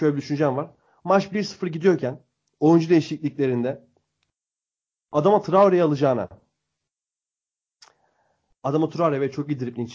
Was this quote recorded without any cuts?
yes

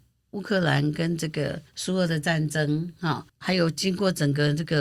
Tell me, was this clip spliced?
yes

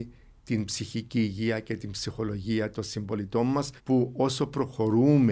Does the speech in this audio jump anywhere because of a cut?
yes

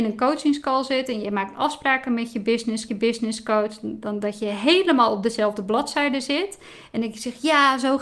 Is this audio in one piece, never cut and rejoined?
no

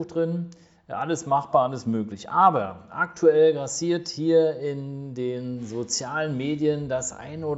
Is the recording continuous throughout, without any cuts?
yes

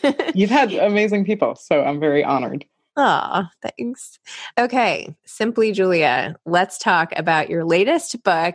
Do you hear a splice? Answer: no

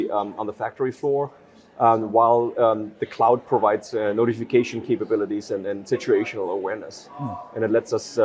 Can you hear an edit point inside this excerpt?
no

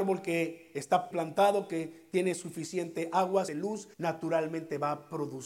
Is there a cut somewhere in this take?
yes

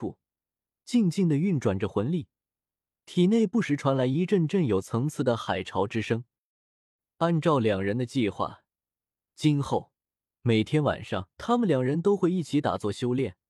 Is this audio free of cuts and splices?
no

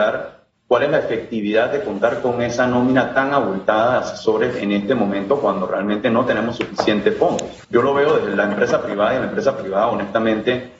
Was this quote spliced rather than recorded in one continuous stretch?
yes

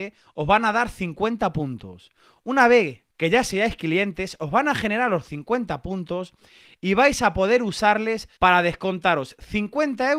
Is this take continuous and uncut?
no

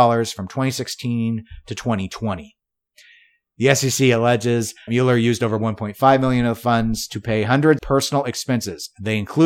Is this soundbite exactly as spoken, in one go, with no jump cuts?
no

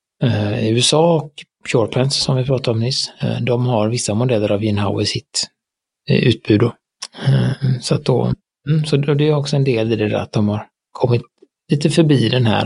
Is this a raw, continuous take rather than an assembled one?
yes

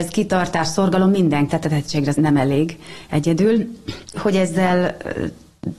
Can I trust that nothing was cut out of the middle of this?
no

